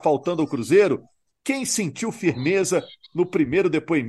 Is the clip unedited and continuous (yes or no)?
yes